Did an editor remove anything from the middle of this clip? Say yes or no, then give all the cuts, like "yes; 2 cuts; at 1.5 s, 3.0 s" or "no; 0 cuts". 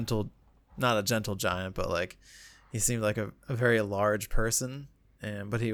no; 0 cuts